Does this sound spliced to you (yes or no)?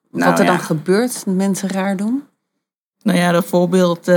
no